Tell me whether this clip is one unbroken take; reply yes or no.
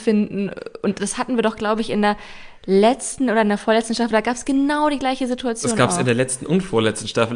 yes